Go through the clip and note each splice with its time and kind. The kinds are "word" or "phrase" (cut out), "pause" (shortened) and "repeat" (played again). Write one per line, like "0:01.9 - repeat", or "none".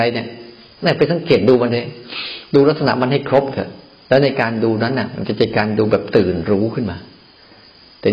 none